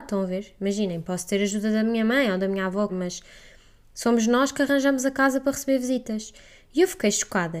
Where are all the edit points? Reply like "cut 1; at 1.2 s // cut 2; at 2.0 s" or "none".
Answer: cut 1; at 2.9 s